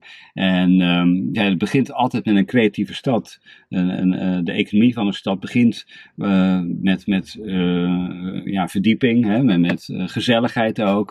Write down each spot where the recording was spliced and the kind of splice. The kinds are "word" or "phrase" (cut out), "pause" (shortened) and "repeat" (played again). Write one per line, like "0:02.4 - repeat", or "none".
0:01.3 - word

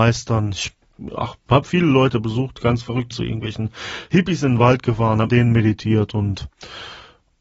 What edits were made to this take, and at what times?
0:03.1 - phrase
0:05.3 - word

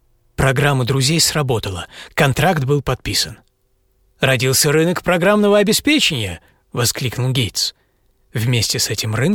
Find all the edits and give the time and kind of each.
none

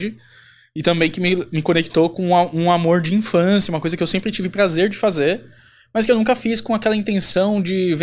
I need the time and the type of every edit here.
none

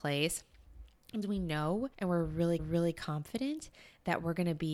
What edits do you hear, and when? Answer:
0:01.2 - word
0:01.9 - pause
0:02.6 - repeat

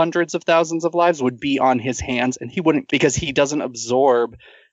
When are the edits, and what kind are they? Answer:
0:02.9 - word

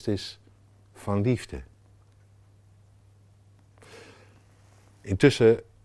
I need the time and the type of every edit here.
none

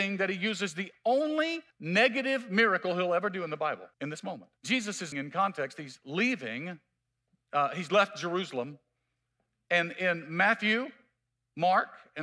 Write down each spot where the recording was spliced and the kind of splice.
0:01.7 - pause
0:03.9 - pause
0:04.6 - pause
0:05.1 - word
0:07.0 - pause

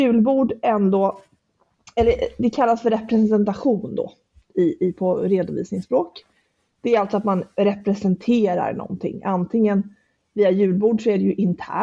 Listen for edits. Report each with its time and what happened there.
none

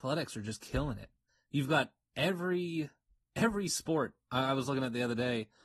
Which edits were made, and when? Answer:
none

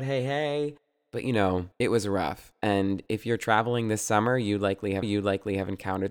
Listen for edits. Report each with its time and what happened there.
0:01.7 - pause
0:05.0 - repeat

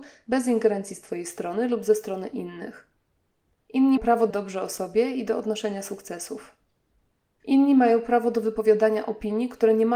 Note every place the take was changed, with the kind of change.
0:04.0 - word
0:04.3 - word

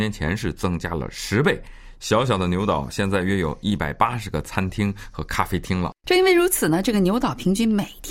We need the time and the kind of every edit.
0:06.0 - pause

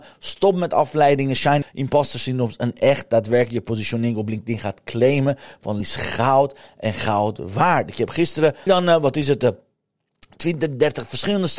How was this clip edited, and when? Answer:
0:01.6 - word
0:05.8 - word
0:08.7 - word

